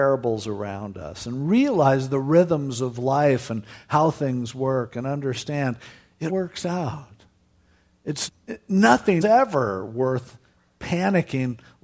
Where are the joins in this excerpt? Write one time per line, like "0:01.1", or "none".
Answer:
0:06.3
0:08.3
0:09.2